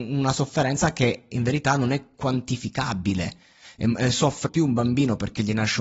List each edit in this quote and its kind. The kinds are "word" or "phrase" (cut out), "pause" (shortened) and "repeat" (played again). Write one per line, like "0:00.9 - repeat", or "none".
0:04.5 - word